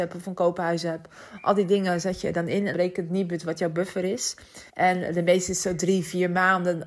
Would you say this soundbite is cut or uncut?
cut